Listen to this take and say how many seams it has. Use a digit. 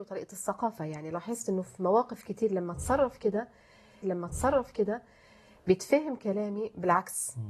1